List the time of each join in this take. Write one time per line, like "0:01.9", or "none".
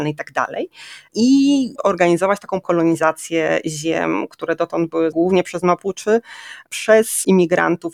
0:01.8
0:02.6
0:05.1